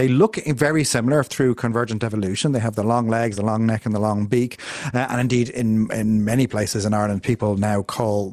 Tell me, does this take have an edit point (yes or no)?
no